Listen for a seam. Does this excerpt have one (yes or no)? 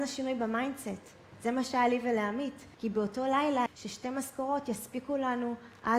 yes